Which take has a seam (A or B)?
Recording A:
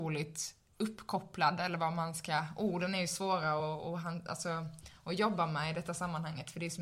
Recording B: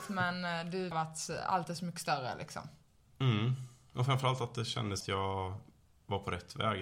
B